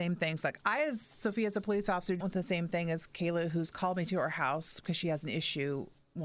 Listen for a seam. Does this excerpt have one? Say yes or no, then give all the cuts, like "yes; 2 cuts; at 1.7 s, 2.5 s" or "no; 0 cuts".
yes; 1 cut; at 2.2 s